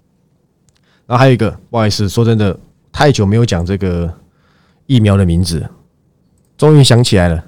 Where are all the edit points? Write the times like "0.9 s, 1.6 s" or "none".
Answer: 6.5 s